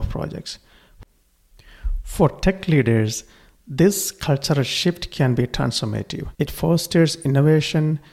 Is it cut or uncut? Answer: cut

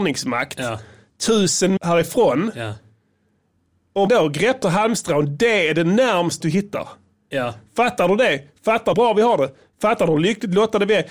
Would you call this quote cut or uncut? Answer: cut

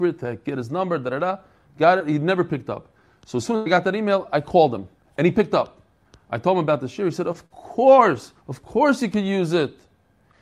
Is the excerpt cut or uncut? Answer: cut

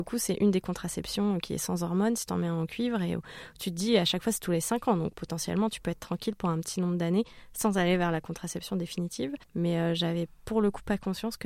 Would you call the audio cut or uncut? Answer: cut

